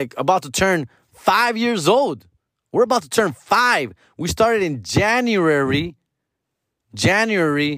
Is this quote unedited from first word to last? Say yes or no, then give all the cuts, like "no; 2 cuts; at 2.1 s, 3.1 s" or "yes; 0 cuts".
yes; 0 cuts